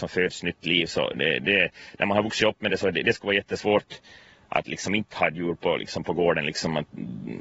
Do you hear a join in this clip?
no; 0 cuts

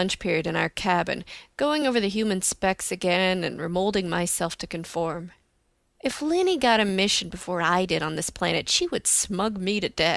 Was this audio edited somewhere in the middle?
no; 0 cuts

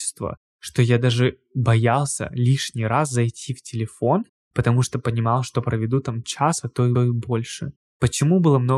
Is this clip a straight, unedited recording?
no; 1 cut; at 7.0 s

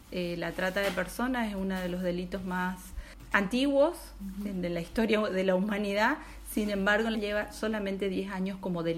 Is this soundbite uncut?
no; 1 cut; at 7.1 s

